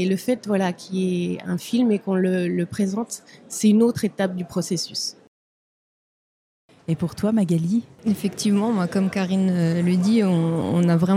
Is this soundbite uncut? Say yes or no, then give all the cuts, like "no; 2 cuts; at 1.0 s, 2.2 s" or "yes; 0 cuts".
yes; 0 cuts